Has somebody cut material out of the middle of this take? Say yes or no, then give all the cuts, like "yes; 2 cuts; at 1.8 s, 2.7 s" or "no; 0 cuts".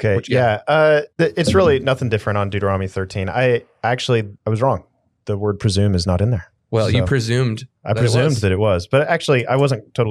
yes; 3 cuts; at 1.1 s, 4.4 s, 7.8 s